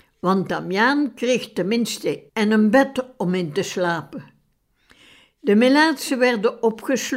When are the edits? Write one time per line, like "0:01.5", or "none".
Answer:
0:02.3